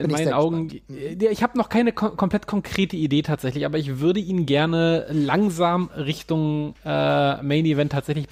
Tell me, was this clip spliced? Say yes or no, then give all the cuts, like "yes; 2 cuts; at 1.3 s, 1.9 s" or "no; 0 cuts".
no; 0 cuts